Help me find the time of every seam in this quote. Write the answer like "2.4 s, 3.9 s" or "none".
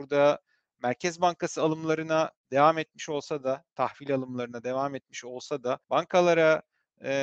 5.8 s